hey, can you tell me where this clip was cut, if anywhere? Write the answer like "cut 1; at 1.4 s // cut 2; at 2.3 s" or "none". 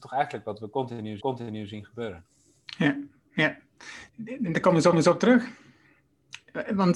cut 1; at 1.2 s // cut 2; at 4.1 s // cut 3; at 4.9 s